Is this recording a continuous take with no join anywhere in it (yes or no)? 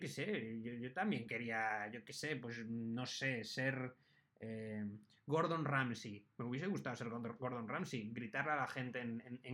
yes